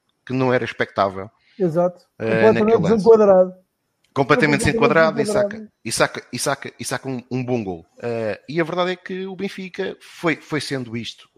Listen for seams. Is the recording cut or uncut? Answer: cut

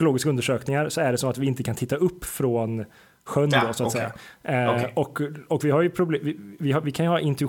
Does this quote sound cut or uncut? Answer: uncut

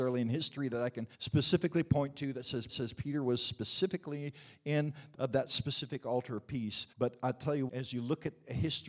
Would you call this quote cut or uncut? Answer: cut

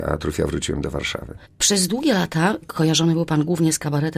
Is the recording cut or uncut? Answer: uncut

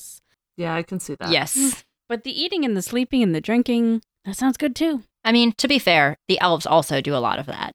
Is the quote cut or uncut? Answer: uncut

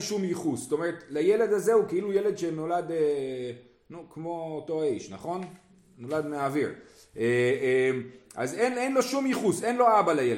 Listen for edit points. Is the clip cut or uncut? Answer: uncut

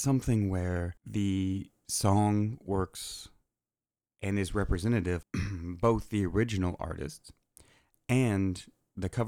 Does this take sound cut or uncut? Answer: cut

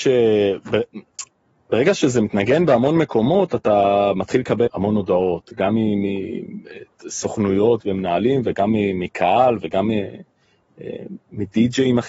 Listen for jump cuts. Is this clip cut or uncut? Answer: cut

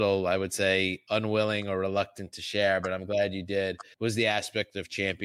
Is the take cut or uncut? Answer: uncut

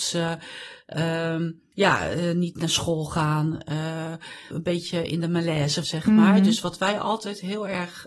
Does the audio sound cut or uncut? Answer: cut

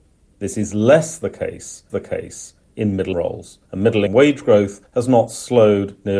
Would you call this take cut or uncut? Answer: cut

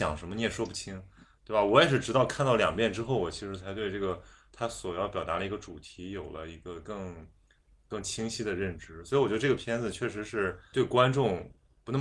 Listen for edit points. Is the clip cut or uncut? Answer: cut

